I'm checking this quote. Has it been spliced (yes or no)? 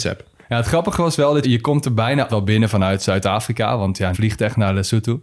yes